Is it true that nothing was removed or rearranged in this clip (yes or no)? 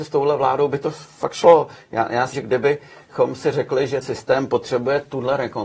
no